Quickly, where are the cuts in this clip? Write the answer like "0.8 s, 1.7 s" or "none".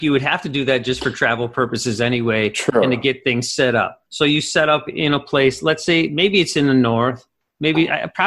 4.1 s

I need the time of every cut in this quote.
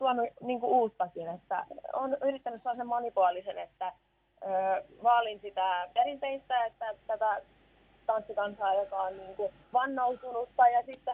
5.9 s, 7.0 s, 9.6 s

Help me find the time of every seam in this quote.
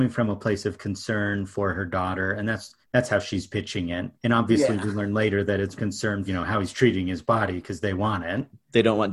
2.8 s, 4.2 s, 5.8 s, 6.3 s

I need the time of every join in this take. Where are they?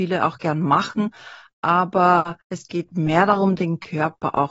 2.4 s

